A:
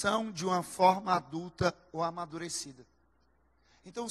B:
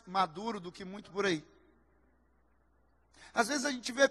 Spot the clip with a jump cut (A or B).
B